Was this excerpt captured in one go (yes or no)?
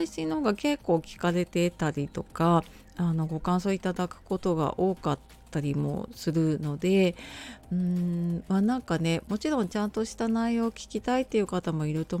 yes